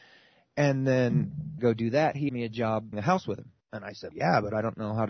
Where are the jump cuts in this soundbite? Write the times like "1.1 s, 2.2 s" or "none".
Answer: 1.6 s, 2.3 s, 2.9 s, 3.6 s, 4.1 s